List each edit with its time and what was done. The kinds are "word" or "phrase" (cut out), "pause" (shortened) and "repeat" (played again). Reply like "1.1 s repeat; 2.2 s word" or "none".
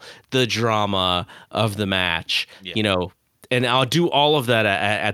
none